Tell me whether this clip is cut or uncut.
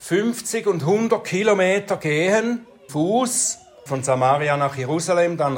cut